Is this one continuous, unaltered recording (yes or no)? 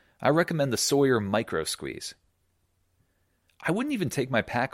yes